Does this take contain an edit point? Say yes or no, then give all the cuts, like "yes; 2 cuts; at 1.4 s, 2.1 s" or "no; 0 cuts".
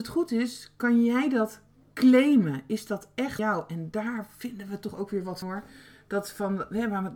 yes; 2 cuts; at 3.4 s, 5.4 s